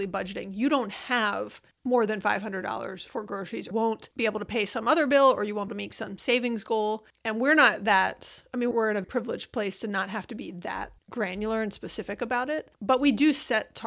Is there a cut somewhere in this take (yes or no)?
yes